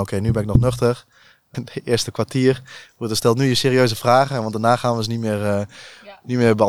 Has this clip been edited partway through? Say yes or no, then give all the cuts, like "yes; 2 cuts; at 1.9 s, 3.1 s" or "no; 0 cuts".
yes; 1 cut; at 1.5 s